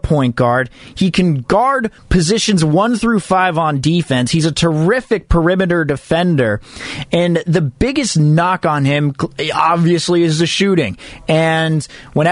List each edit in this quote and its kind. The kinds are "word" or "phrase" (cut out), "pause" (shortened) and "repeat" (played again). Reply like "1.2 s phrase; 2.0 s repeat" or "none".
2.0 s pause

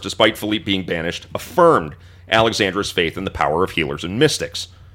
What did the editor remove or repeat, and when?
none

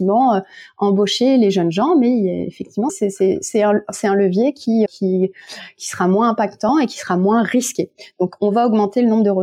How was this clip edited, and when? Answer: 2.9 s word; 4.9 s word

